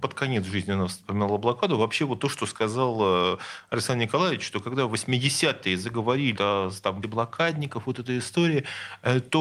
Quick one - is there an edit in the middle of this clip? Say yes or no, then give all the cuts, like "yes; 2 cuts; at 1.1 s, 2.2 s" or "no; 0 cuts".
yes; 2 cuts; at 6.3 s, 7.0 s